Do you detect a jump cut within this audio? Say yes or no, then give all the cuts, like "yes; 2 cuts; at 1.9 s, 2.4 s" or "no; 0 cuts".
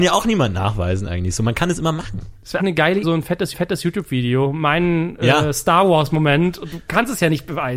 yes; 3 cuts; at 2.6 s, 3.0 s, 3.5 s